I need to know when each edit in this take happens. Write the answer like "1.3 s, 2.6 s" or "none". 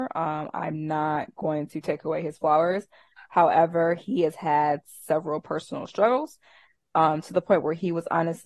none

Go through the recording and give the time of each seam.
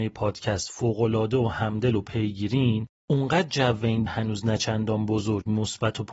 4.1 s

